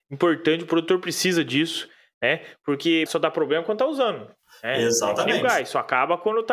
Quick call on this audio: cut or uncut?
cut